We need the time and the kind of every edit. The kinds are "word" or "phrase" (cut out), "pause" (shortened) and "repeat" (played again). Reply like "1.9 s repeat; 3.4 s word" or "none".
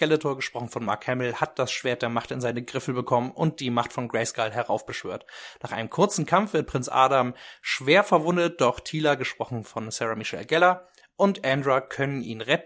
none